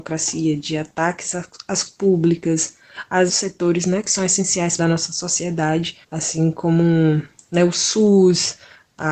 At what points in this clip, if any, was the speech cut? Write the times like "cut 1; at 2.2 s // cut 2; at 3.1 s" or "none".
cut 1; at 1.9 s // cut 2; at 3.3 s // cut 3; at 4.8 s // cut 4; at 6.0 s

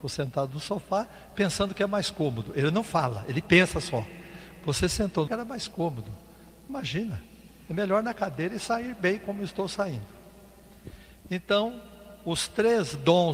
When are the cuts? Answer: cut 1; at 5.3 s

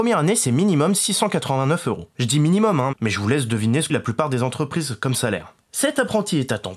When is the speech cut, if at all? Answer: cut 1; at 2.1 s // cut 2; at 3.9 s

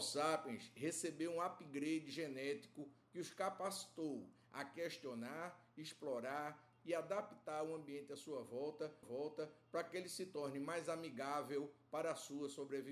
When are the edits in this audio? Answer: cut 1; at 6.8 s // cut 2; at 9.0 s

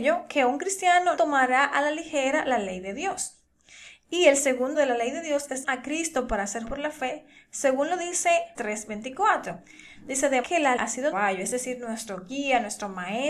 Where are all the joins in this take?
cut 1; at 1.2 s // cut 2; at 4.7 s // cut 3; at 5.6 s // cut 4; at 6.6 s // cut 5; at 8.5 s // cut 6; at 10.4 s // cut 7; at 10.8 s // cut 8; at 11.1 s

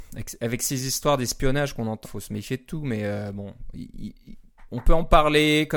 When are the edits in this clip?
cut 1; at 2.0 s

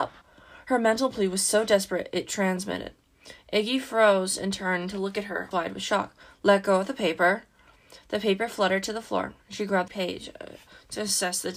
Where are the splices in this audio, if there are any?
cut 1; at 5.5 s // cut 2; at 9.9 s

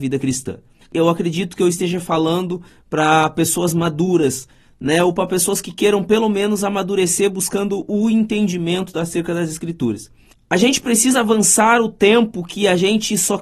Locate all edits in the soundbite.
none

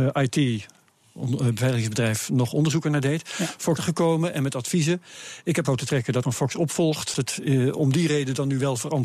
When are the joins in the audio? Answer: cut 1; at 3.8 s // cut 2; at 5.6 s // cut 3; at 6.2 s // cut 4; at 7.1 s

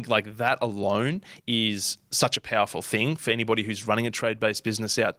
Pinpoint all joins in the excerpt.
none

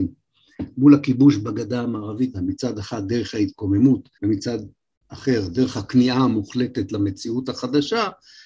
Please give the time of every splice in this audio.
cut 1; at 2.3 s // cut 2; at 4.1 s

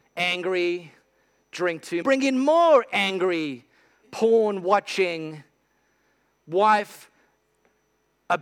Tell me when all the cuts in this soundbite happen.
cut 1; at 2.0 s

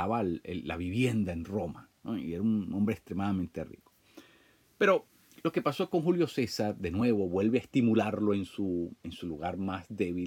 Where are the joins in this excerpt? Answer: none

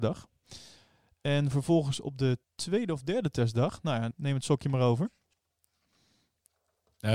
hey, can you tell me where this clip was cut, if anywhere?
cut 1; at 2.4 s // cut 2; at 4.1 s

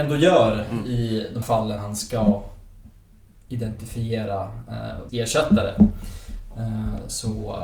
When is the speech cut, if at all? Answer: cut 1; at 1.4 s // cut 2; at 1.8 s // cut 3; at 5.1 s

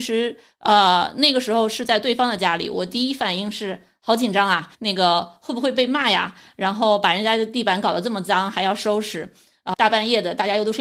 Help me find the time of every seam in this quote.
cut 1; at 4.7 s // cut 2; at 9.7 s

